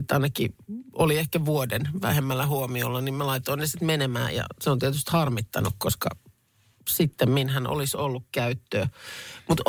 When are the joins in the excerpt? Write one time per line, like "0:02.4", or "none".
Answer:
none